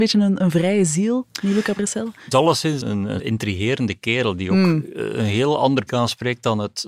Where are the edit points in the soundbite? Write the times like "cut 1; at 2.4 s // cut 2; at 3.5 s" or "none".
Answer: cut 1; at 2.3 s // cut 2; at 2.8 s // cut 3; at 3.2 s // cut 4; at 5.9 s